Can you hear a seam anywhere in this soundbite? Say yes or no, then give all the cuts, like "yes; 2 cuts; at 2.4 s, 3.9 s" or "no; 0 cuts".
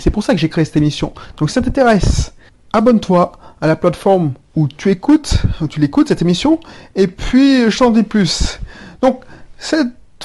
no; 0 cuts